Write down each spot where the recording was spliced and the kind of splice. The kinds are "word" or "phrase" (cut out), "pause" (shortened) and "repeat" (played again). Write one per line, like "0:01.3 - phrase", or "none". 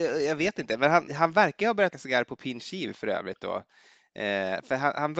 0:01.1 - word
0:01.9 - word